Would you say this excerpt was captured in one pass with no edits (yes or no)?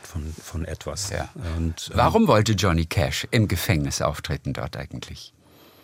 no